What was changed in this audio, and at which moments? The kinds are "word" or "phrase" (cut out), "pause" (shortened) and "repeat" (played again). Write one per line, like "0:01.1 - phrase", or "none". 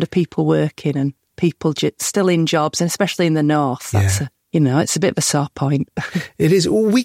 none

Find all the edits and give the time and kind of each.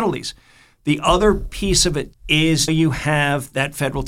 0:02.1 - word
0:02.7 - word

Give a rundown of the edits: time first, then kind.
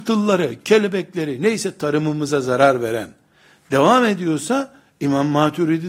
none

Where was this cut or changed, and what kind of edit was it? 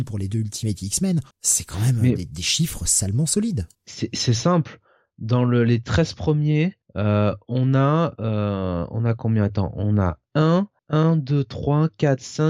0:01.3 - pause
0:03.7 - pause
0:06.8 - pause
0:10.8 - pause

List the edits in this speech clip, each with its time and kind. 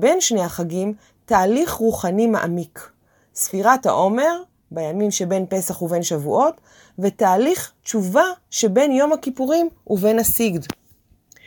none

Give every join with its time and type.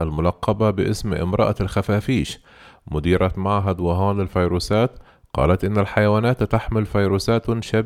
none

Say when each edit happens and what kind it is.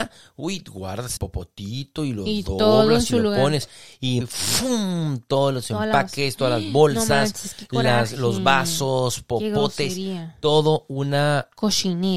0:01.2 - word
0:04.2 - phrase

